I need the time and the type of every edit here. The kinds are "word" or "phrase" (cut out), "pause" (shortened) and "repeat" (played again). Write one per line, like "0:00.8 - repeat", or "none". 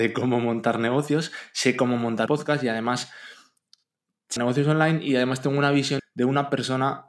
0:02.3 - word
0:04.4 - word
0:06.0 - word